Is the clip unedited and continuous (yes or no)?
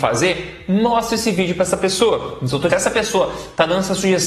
no